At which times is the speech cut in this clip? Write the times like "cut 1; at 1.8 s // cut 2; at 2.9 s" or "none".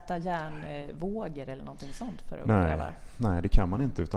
none